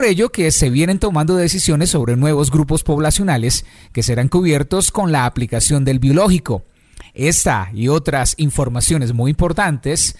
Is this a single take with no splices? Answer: yes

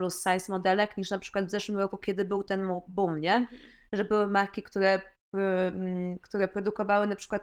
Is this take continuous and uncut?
yes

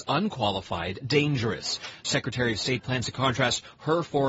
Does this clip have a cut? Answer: yes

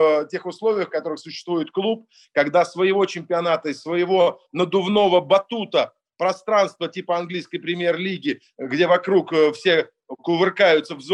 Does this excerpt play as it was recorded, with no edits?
yes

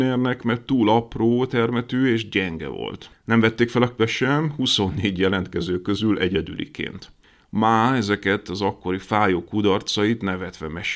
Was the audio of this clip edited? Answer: yes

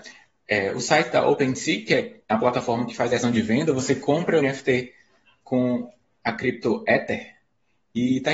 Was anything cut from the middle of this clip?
yes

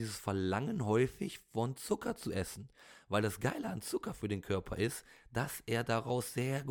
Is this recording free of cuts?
yes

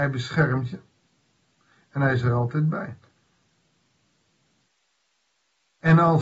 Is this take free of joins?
yes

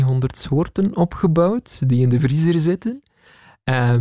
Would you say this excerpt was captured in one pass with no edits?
yes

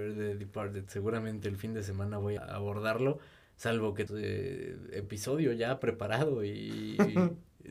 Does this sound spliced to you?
yes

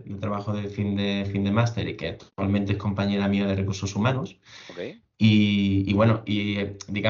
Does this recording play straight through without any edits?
no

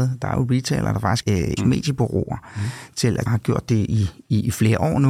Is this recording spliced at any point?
yes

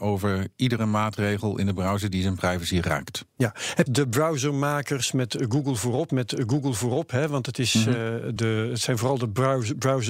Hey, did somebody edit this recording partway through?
yes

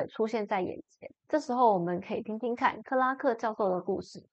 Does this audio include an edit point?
yes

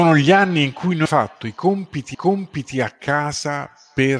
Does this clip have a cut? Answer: yes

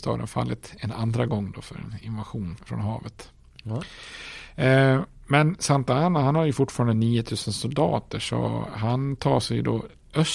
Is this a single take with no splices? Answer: no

